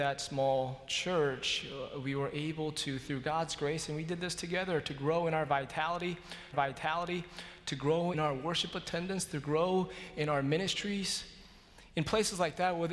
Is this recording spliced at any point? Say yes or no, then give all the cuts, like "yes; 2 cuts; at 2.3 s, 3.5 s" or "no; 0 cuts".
yes; 2 cuts; at 6.5 s, 8.1 s